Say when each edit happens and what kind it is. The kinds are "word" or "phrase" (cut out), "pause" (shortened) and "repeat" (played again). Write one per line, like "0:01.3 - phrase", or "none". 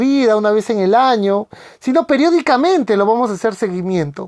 none